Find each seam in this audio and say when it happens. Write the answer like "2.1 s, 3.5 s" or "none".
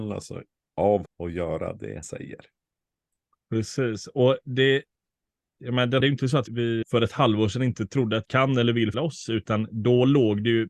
1.1 s, 2.0 s, 5.6 s, 6.0 s, 6.5 s, 6.8 s, 8.2 s, 8.9 s